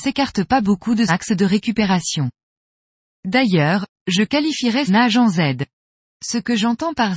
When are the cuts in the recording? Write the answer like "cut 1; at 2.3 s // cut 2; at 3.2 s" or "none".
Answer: cut 1; at 1.1 s // cut 2; at 4.9 s